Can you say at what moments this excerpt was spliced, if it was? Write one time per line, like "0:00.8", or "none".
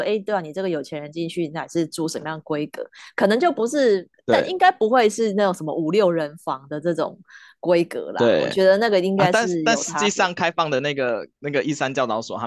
0:11.3